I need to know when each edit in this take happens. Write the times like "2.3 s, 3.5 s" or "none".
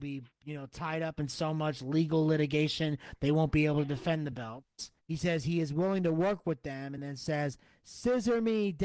none